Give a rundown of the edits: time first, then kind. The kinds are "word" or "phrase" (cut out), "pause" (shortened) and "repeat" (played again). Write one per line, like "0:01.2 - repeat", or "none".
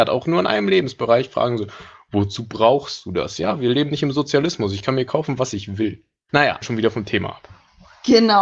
0:06.6 - phrase